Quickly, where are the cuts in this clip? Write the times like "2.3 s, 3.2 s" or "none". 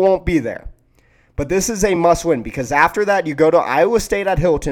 none

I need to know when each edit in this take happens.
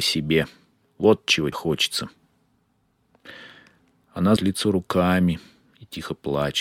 1.5 s, 4.4 s

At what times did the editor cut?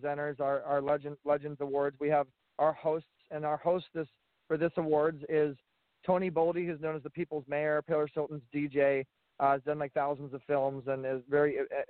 none

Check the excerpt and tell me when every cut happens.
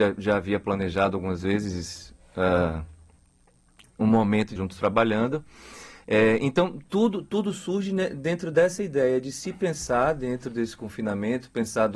4.6 s

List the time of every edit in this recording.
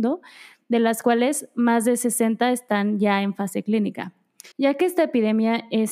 4.5 s

